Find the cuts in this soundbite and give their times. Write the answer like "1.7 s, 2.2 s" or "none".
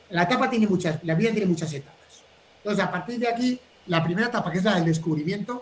none